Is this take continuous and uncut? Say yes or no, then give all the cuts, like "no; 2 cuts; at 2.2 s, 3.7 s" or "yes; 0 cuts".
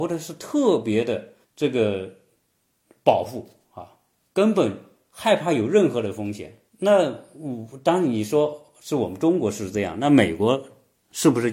no; 2 cuts; at 1.4 s, 6.7 s